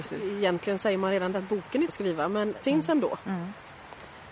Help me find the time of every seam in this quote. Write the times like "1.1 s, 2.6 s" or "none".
1.3 s, 1.9 s, 2.6 s